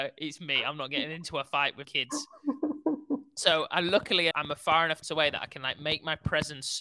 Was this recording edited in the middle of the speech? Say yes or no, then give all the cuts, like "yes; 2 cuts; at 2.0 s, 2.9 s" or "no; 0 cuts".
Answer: yes; 3 cuts; at 1.8 s, 4.3 s, 5.0 s